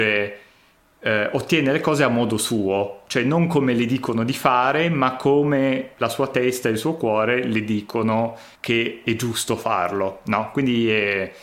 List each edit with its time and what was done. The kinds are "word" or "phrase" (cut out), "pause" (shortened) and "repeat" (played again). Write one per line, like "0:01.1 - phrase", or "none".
0:08.5 - pause